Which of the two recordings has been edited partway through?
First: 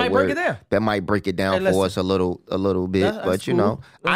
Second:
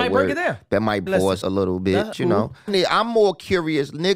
second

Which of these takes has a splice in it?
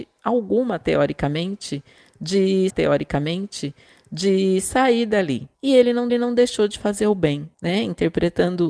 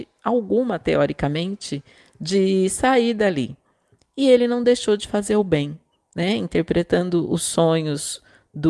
first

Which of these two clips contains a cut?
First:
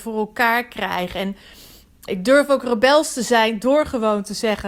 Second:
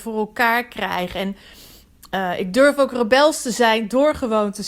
first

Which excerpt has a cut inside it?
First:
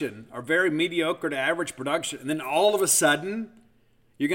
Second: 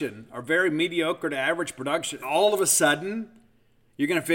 second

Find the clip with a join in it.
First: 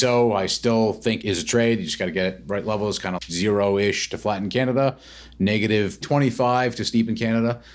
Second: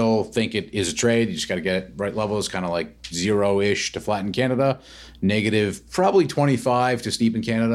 first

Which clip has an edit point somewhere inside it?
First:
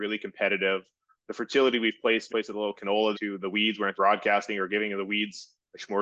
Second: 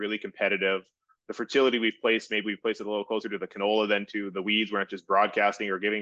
first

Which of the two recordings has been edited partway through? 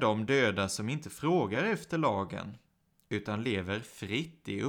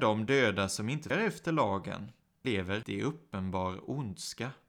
second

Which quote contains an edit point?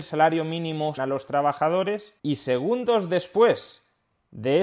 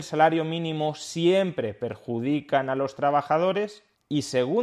first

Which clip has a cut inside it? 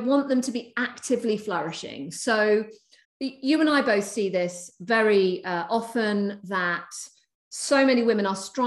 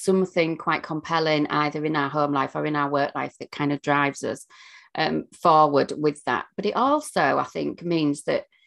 first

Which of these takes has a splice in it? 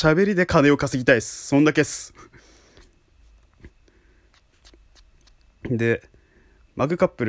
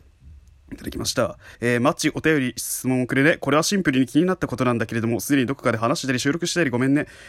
second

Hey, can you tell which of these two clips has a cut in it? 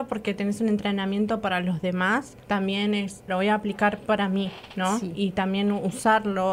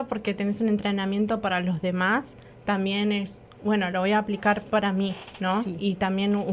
first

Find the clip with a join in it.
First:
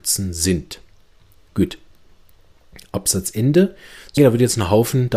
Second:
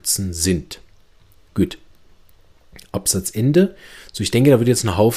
first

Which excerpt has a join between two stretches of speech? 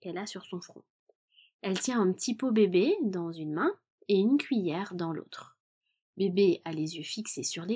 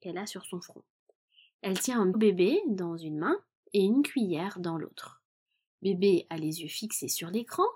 second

